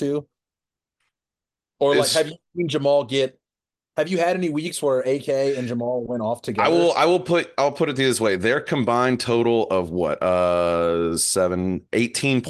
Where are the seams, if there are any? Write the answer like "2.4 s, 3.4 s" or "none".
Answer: none